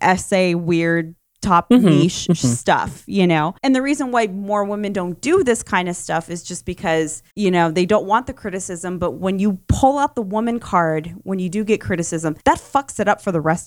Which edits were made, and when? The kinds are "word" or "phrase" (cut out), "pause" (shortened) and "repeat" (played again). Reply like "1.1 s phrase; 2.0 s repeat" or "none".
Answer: 3.6 s pause; 7.3 s pause; 12.4 s pause